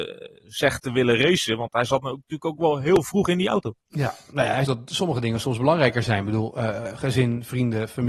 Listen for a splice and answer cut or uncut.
cut